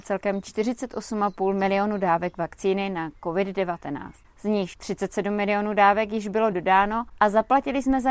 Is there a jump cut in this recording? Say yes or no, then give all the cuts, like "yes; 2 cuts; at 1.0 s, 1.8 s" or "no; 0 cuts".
no; 0 cuts